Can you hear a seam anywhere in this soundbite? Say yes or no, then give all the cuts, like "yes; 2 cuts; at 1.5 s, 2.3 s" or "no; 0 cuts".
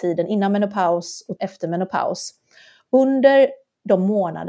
yes; 1 cut; at 1.4 s